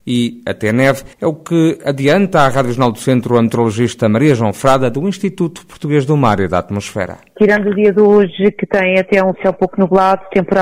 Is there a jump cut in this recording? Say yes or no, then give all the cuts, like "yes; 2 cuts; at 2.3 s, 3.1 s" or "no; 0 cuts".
yes; 1 cut; at 1.1 s